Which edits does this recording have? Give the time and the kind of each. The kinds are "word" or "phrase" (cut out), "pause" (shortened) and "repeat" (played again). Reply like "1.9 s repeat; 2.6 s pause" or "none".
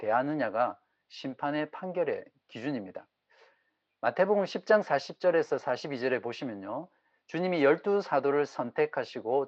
none